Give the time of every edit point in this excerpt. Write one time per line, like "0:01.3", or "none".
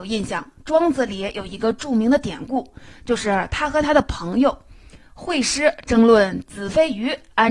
none